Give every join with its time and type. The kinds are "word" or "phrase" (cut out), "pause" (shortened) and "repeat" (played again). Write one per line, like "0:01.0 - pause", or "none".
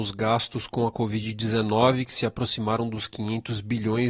none